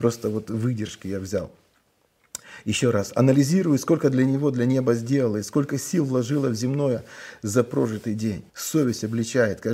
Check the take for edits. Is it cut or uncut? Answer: cut